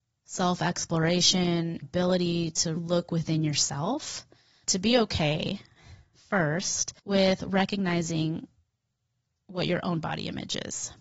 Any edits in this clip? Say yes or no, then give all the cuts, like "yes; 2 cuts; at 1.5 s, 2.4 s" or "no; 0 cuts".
yes; 4 cuts; at 1.8 s, 2.8 s, 4.6 s, 7.0 s